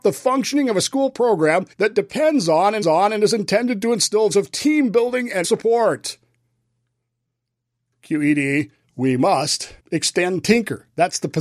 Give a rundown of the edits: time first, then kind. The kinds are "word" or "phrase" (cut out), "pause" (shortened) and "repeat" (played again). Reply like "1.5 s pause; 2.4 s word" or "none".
1.7 s pause; 2.8 s repeat; 4.3 s word; 5.4 s word; 8.8 s pause; 9.8 s pause